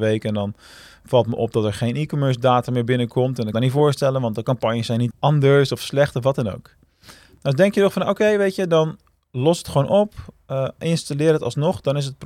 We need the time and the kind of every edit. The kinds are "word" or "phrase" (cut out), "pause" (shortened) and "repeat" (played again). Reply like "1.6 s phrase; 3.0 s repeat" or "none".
3.5 s phrase; 5.1 s word

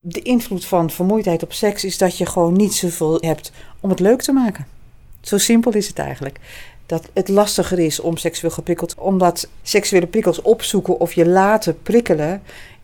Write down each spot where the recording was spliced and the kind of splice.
3.2 s word; 8.9 s word

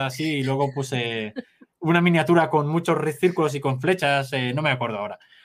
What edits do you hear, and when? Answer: none

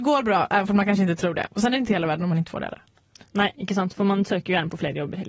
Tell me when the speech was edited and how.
none

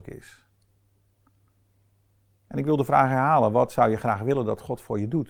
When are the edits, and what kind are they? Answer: none

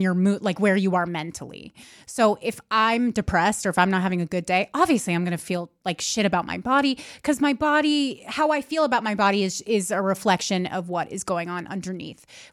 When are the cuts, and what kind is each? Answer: none

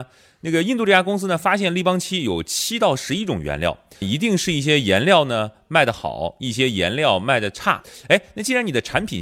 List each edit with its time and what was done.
4.0 s word

